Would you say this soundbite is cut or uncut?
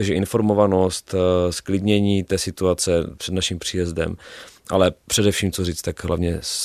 uncut